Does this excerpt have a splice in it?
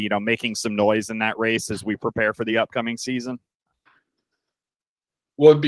no; 0 cuts

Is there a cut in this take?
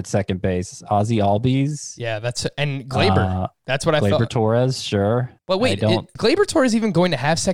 yes; 2 cuts; at 5.4 s, 6.2 s

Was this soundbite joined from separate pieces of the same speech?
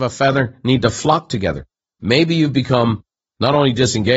no; 0 cuts

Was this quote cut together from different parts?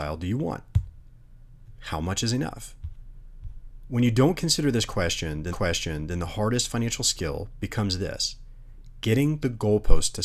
yes; 1 cut; at 5.5 s

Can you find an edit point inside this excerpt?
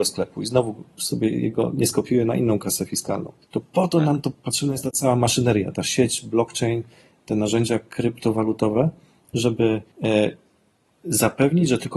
yes; 2 cuts; at 3.4 s, 9.9 s

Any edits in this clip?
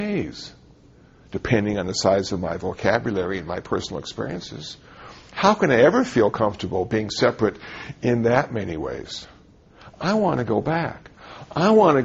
no; 0 cuts

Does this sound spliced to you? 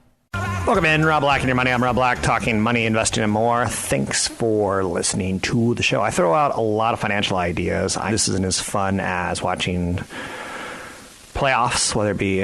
yes; 2 cuts; at 6.1 s, 8.1 s

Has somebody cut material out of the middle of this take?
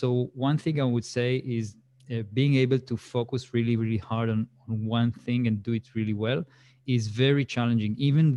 no; 0 cuts

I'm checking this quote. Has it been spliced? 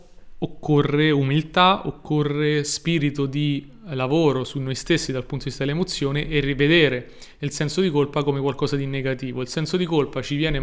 no; 0 cuts

